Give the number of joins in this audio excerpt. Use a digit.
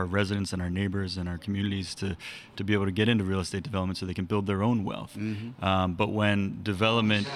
0